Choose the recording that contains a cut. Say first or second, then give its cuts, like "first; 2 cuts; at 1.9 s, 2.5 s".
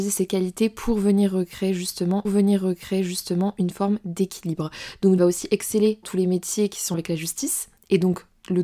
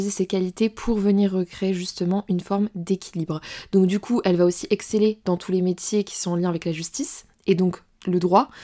first; 4 cuts; at 2.2 s, 5.2 s, 6.0 s, 6.9 s